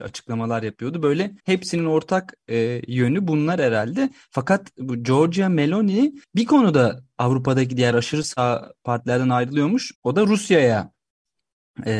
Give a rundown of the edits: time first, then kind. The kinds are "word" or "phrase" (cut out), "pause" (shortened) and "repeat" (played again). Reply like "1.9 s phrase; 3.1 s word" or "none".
1.4 s pause; 6.2 s pause; 9.9 s pause